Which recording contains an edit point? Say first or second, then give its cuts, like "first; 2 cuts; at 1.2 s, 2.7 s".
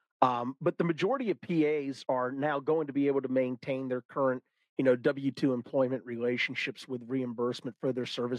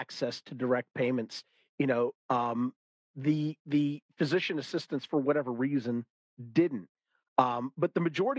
first; 1 cut; at 2.1 s